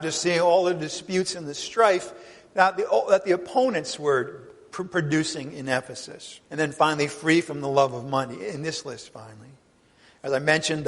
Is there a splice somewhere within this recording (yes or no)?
yes